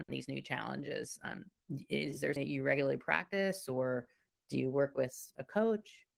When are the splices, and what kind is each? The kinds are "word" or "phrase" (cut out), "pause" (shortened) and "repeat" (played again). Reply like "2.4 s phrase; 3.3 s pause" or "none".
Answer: 2.4 s word